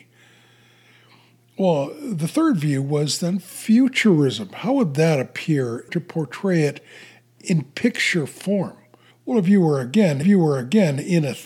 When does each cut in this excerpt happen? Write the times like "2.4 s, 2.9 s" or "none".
5.9 s, 9.1 s, 10.2 s